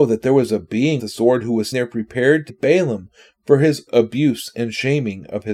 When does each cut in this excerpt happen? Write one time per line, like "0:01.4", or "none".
0:01.0
0:01.7
0:02.5
0:03.9